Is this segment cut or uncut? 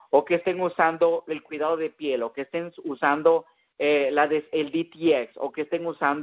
uncut